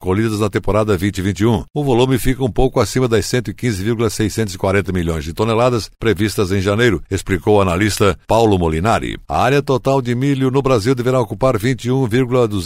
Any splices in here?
no; 0 cuts

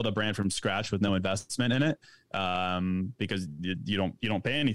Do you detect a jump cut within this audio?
no; 0 cuts

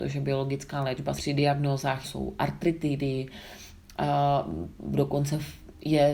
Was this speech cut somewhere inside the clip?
yes; 3 cuts; at 1.2 s, 2.0 s, 4.8 s

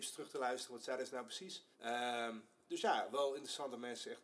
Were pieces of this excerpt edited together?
yes; 1 cut; at 1.7 s

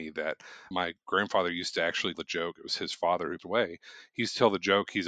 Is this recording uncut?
no; 2 cuts; at 2.1 s, 3.4 s

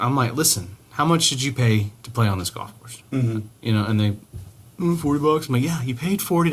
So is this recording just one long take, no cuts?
yes; 0 cuts

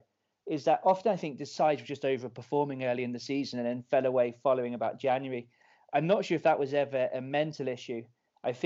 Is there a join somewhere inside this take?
no; 0 cuts

